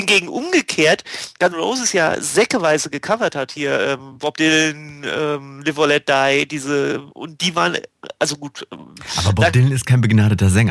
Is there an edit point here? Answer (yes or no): yes